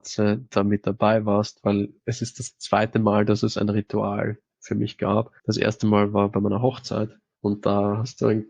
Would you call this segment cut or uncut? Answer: cut